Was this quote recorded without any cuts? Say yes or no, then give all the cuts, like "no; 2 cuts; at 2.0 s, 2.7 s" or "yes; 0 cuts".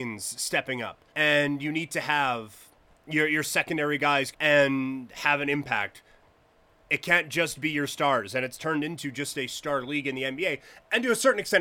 no; 2 cuts; at 1.1 s, 4.3 s